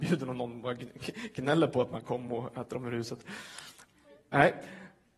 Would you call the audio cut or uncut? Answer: uncut